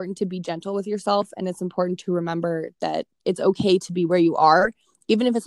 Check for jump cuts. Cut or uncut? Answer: uncut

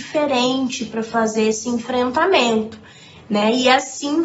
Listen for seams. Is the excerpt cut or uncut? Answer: uncut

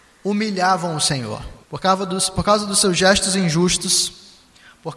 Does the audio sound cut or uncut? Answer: cut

